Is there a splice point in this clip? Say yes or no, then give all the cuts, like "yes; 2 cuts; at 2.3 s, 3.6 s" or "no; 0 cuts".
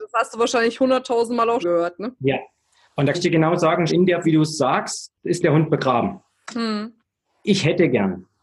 yes; 5 cuts; at 1.6 s, 3.1 s, 3.9 s, 4.2 s, 5.4 s